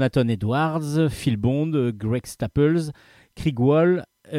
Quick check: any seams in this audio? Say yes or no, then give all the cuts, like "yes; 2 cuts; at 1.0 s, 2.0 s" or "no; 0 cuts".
no; 0 cuts